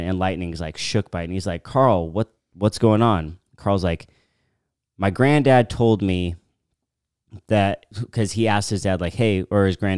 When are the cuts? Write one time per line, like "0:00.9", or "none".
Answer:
0:07.9